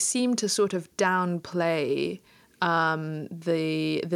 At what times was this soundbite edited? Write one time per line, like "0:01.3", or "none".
none